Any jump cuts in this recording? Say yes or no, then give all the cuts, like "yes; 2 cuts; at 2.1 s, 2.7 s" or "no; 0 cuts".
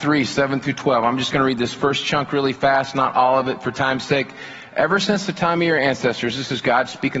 no; 0 cuts